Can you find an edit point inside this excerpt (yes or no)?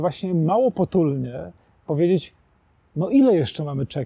no